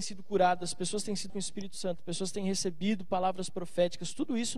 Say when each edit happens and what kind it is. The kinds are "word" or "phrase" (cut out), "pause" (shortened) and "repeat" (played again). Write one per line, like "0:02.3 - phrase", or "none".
0:01.3 - word

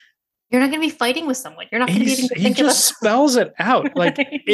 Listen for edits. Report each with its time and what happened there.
none

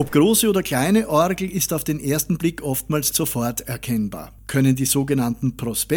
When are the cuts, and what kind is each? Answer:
0:03.1 - word

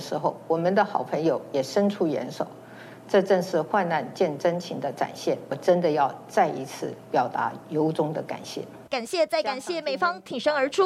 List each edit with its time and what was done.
0:07.0 - pause
0:08.9 - pause

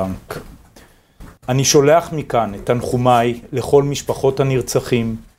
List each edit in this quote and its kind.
0:01.4 - pause

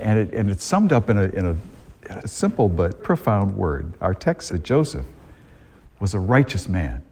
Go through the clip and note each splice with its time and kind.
0:02.2 - word
0:03.0 - word
0:04.5 - word

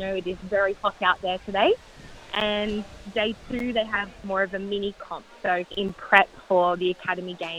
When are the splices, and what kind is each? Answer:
0:05.7 - pause

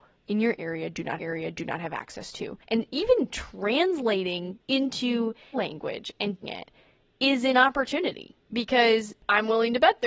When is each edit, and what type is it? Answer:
0:01.2 - repeat
0:02.6 - pause
0:04.6 - word
0:05.5 - word
0:06.4 - word
0:08.4 - pause

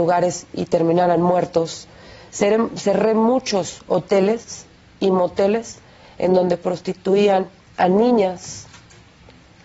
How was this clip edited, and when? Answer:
none

